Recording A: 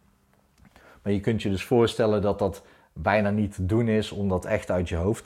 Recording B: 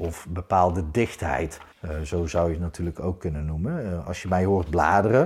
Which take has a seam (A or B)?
B